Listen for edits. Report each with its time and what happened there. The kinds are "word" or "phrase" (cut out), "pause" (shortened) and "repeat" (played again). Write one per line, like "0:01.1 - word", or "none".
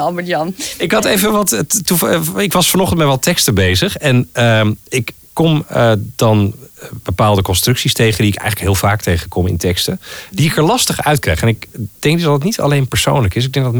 none